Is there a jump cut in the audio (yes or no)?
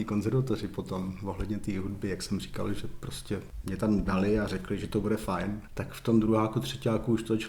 no